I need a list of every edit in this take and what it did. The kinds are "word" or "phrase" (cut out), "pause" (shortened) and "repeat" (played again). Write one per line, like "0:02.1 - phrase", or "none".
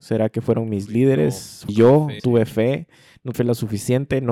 0:01.7 - word
0:02.2 - word
0:03.3 - word